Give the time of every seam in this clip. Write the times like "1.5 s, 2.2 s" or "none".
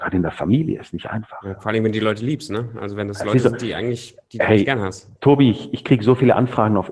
5.2 s